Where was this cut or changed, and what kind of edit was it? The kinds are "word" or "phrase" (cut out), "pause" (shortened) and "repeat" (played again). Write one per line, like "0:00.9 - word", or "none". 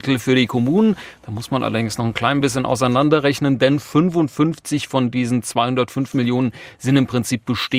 none